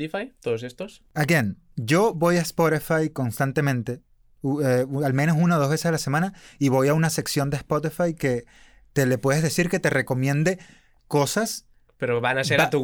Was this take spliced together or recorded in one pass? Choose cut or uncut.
uncut